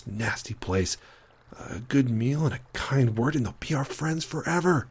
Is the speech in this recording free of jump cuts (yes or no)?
yes